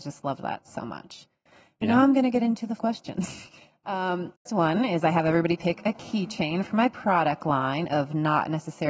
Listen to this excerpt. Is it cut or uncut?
cut